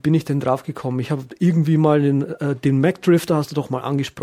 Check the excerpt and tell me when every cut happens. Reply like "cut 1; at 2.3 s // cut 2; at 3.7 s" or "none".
none